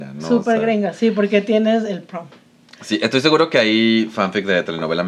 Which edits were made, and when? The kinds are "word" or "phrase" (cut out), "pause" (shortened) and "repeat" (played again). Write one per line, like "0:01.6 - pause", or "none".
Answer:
none